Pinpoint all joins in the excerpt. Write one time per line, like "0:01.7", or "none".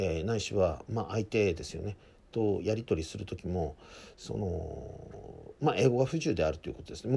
none